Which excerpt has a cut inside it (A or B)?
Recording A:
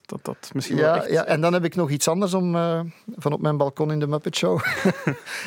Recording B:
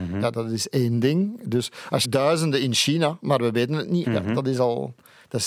B